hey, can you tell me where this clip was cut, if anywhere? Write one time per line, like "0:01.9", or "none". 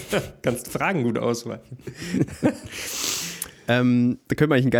none